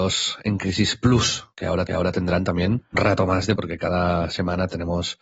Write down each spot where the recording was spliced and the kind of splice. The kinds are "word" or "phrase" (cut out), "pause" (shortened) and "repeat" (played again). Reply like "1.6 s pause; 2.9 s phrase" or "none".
1.5 s pause; 1.9 s repeat; 2.9 s word; 3.6 s word